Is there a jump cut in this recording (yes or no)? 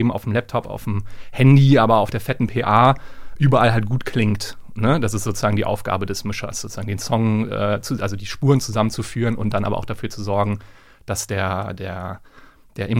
no